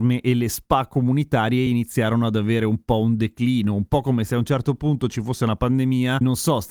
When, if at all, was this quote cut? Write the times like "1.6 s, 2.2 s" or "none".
none